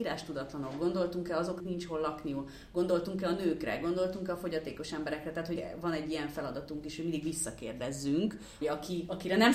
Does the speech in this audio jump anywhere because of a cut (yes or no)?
yes